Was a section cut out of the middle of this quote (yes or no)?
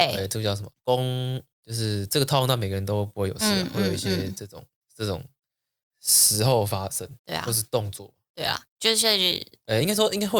yes